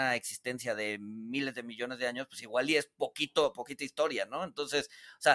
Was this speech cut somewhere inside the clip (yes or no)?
no